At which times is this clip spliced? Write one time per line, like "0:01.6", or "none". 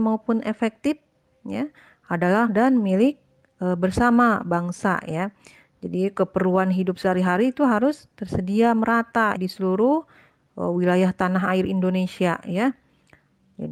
0:02.5
0:09.4